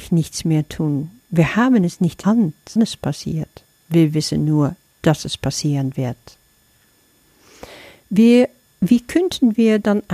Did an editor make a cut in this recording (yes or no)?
yes